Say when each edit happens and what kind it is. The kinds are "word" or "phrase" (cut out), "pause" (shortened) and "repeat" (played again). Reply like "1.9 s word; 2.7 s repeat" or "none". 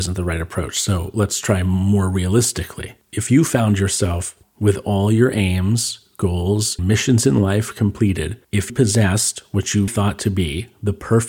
4.4 s word; 6.8 s word; 8.7 s word; 9.9 s word